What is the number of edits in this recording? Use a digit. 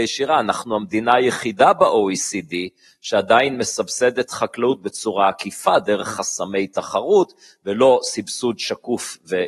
0